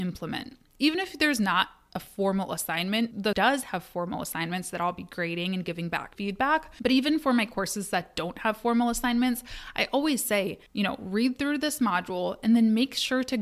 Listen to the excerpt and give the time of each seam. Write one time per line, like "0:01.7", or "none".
0:03.3
0:06.1
0:10.7